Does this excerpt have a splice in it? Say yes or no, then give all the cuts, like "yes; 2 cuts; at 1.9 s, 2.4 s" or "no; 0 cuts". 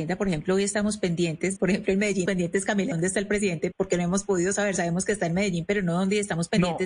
yes; 4 cuts; at 1.6 s, 2.3 s, 2.9 s, 3.7 s